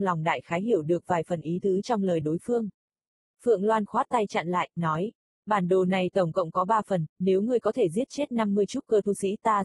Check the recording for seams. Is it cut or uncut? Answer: uncut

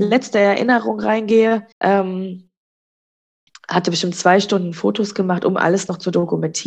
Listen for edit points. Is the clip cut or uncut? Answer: cut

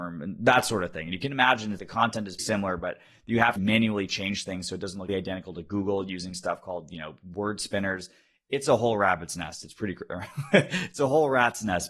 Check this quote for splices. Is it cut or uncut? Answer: cut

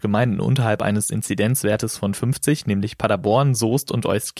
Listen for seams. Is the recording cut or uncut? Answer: uncut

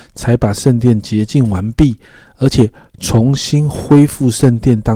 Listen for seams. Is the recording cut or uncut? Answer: uncut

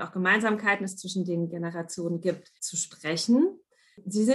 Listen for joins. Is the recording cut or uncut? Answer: cut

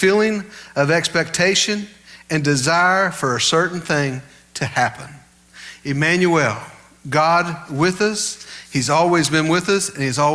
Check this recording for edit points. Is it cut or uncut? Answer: uncut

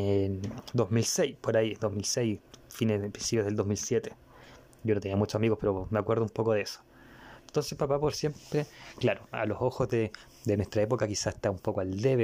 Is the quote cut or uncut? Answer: uncut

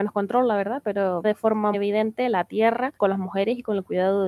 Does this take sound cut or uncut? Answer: cut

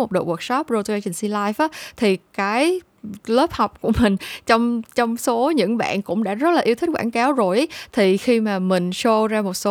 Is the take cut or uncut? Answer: uncut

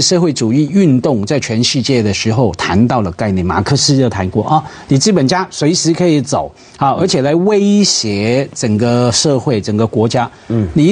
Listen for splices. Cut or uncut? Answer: uncut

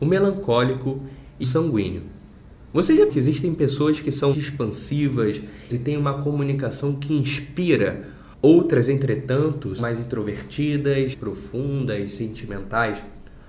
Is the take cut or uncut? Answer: cut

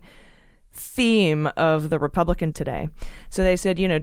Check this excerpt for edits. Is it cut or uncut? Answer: cut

